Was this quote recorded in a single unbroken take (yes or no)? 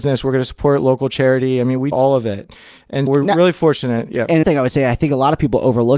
no